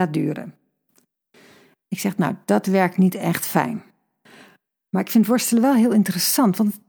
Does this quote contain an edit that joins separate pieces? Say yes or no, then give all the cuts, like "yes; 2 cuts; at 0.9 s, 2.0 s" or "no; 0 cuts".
no; 0 cuts